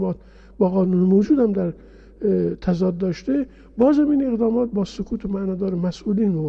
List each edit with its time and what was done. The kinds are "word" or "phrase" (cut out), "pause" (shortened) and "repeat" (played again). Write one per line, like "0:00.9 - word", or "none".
none

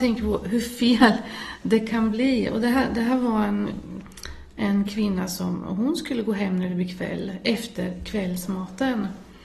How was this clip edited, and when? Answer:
none

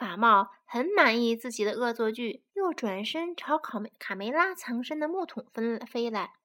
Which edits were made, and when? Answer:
0:02.5 - pause

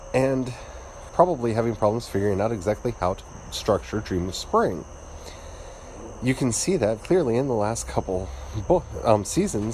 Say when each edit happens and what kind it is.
0:01.1 - word
0:07.0 - word

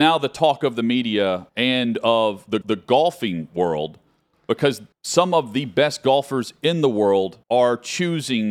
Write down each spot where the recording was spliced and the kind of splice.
0:01.5 - pause
0:02.6 - repeat
0:04.9 - pause
0:07.4 - pause

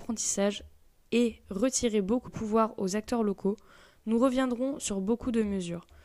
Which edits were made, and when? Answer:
0:02.3 - word

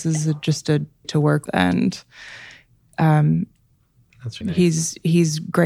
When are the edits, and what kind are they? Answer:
0:01.0 - word
0:01.5 - word
0:04.4 - word

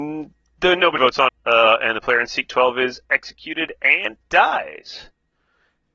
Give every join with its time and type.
0:01.0 - word
0:01.3 - word

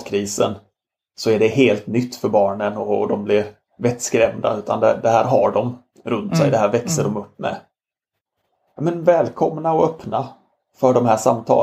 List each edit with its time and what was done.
none

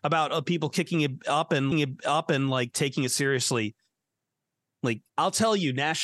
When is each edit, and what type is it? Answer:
0:01.7 - repeat
0:05.1 - pause

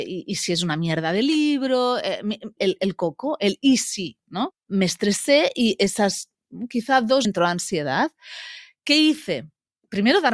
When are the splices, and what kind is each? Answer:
0:02.6 - word
0:07.2 - phrase

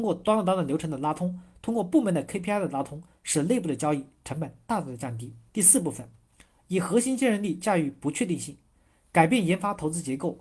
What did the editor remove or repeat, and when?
0:05.5 - pause

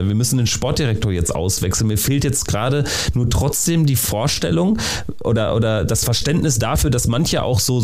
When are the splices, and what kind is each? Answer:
none

